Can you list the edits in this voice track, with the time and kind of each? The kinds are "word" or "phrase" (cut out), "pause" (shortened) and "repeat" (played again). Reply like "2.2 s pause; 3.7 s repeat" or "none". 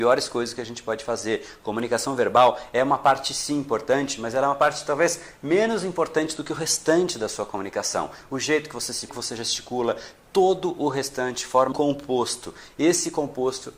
9.1 s phrase; 11.7 s word